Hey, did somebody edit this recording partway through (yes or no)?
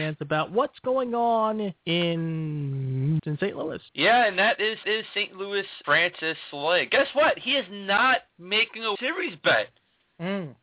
yes